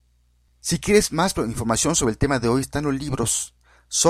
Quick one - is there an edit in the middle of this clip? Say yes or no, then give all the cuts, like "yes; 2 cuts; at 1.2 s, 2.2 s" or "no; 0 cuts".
no; 0 cuts